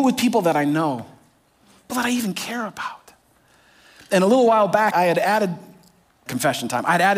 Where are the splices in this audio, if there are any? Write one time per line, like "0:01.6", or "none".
0:01.9
0:04.9
0:06.3